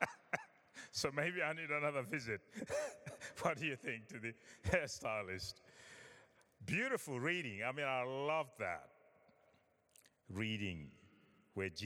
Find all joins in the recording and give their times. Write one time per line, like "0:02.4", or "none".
none